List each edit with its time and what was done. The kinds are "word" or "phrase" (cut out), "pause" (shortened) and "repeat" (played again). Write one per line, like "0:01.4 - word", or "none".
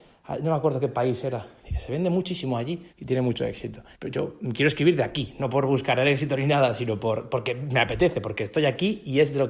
0:02.9 - pause
0:03.9 - pause